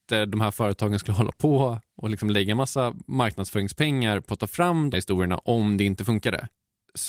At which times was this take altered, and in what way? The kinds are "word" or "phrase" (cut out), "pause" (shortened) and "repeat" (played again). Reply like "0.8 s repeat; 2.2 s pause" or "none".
4.9 s word